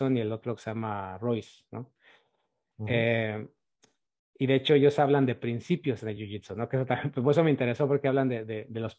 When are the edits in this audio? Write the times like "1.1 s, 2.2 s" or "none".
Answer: none